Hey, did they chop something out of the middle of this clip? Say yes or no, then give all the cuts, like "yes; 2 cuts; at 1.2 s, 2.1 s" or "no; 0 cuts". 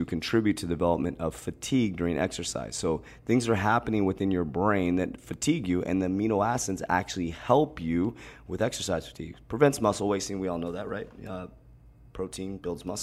no; 0 cuts